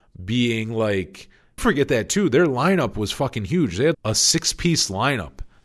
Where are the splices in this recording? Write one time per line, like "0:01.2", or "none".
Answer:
0:01.6
0:03.9